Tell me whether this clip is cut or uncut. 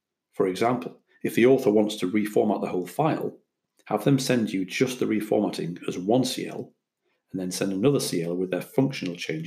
uncut